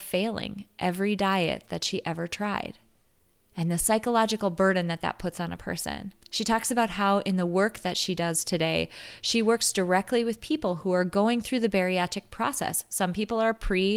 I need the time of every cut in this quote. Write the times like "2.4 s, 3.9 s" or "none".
6.2 s